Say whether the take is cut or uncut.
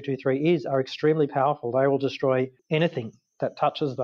uncut